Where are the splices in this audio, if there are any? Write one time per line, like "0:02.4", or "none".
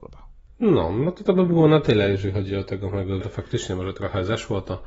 0:03.2